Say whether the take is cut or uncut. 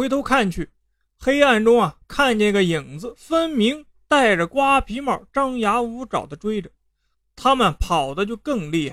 uncut